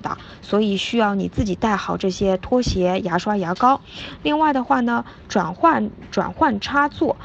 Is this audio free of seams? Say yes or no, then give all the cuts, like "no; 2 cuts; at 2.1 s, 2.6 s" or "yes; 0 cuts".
yes; 0 cuts